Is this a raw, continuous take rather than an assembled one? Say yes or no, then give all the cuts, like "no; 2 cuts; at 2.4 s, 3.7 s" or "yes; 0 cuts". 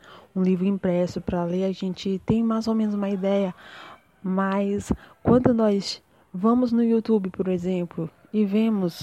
yes; 0 cuts